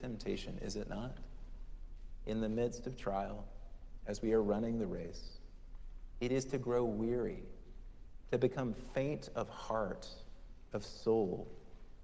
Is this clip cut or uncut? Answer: uncut